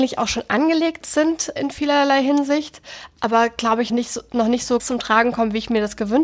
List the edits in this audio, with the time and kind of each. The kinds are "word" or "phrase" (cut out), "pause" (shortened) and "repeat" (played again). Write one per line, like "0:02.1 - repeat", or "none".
0:01.6 - word
0:03.9 - word
0:04.8 - word